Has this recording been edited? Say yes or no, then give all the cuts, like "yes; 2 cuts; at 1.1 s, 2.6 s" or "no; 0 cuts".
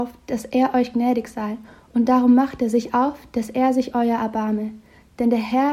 no; 0 cuts